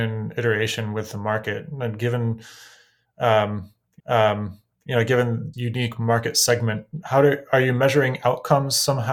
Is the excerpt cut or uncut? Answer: cut